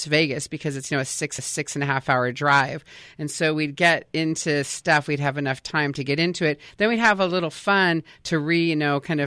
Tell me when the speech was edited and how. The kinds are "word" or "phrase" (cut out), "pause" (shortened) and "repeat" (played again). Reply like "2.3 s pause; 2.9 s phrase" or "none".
1.4 s repeat